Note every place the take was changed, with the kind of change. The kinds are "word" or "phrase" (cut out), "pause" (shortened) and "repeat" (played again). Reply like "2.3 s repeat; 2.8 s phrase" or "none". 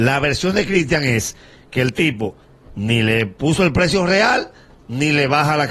none

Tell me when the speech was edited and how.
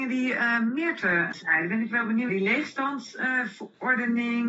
2.3 s word

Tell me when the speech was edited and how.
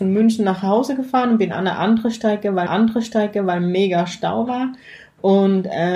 2.7 s repeat

